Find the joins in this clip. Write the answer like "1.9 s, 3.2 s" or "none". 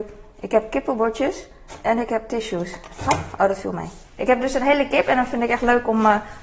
4.0 s